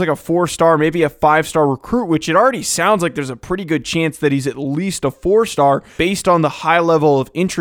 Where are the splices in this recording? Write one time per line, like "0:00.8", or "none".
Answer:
0:06.0